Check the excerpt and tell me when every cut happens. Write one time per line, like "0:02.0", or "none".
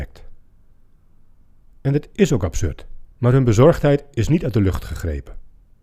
0:03.1